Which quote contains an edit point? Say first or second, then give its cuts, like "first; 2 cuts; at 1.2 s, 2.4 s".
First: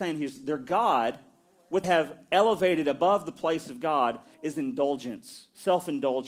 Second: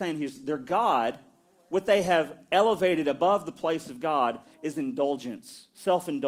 first; 1 cut; at 1.8 s